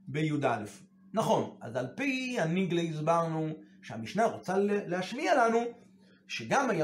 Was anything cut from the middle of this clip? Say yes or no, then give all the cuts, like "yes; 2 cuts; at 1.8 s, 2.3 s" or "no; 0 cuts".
no; 0 cuts